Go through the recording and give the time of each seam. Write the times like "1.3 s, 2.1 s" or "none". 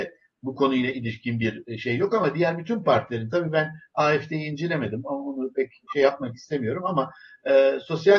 none